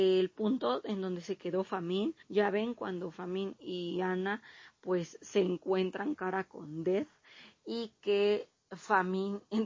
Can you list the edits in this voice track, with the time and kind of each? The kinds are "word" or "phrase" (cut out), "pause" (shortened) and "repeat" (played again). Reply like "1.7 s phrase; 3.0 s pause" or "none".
2.2 s pause; 6.1 s phrase